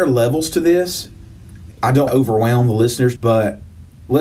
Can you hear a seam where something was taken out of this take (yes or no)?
yes